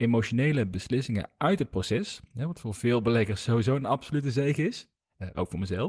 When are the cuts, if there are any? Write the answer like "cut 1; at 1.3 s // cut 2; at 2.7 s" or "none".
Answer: none